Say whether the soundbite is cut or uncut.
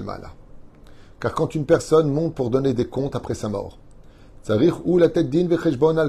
uncut